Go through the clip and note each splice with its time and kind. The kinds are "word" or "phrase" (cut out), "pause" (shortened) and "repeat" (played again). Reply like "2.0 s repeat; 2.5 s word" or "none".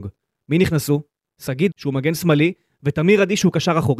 1.7 s word